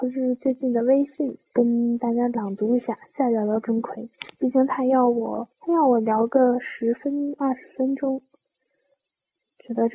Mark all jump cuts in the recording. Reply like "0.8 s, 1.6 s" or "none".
1.4 s, 5.5 s